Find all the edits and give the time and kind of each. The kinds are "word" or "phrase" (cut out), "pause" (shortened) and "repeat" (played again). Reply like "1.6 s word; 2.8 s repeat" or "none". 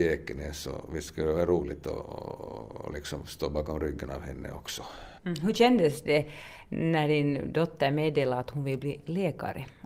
5.2 s pause